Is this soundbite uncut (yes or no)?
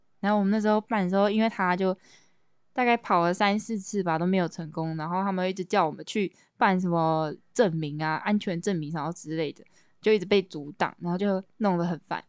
yes